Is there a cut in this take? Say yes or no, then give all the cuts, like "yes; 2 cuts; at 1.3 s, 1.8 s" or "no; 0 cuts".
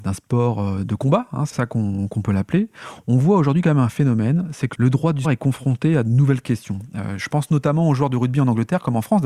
yes; 2 cuts; at 1.5 s, 5.2 s